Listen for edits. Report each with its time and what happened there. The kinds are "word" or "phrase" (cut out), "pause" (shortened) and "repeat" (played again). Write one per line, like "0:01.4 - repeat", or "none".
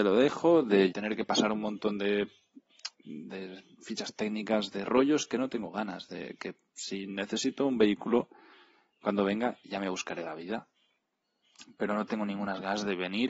0:00.9 - phrase
0:02.9 - pause